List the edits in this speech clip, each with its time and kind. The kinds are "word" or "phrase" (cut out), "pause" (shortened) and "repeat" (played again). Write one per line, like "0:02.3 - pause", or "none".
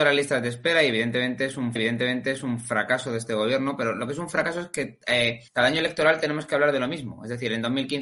0:01.8 - repeat
0:05.5 - pause